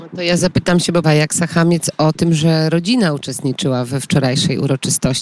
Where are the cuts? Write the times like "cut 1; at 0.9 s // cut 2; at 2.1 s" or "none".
cut 1; at 1.0 s